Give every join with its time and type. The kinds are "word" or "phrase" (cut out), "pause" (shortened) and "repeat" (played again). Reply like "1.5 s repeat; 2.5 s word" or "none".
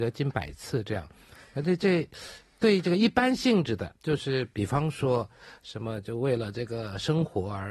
4.0 s pause